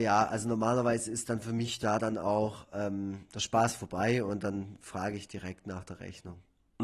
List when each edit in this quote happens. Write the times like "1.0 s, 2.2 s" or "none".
none